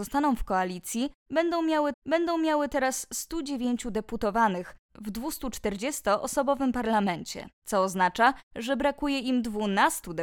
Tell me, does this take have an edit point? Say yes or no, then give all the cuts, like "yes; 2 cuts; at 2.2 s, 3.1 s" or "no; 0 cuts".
yes; 2 cuts; at 1.9 s, 7.5 s